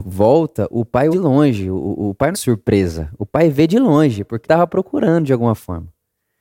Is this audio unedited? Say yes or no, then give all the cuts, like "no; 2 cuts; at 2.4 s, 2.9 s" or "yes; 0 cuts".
no; 3 cuts; at 1.1 s, 2.3 s, 4.4 s